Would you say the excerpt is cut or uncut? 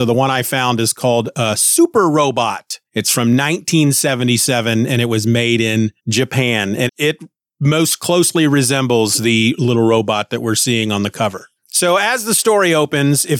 cut